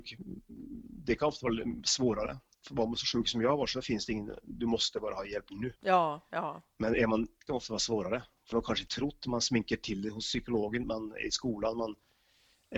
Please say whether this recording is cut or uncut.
cut